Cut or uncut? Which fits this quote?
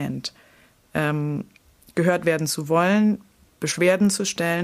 uncut